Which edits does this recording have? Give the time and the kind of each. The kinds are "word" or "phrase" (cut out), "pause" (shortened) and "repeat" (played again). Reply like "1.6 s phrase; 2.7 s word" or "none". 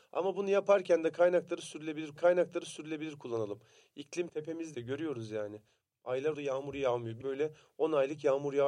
2.2 s repeat; 4.3 s word; 4.7 s word; 6.3 s word; 7.2 s phrase